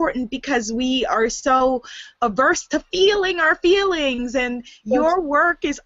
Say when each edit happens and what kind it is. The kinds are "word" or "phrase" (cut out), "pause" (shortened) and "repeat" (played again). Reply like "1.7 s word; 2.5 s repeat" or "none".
none